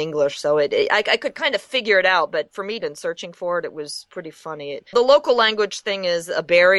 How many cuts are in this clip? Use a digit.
2